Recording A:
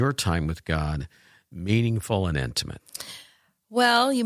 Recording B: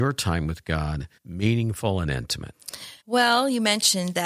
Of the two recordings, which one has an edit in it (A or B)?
B